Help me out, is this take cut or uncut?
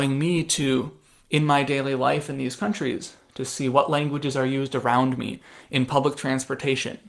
uncut